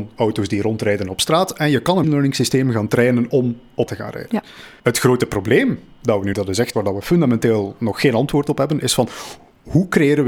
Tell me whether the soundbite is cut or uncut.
cut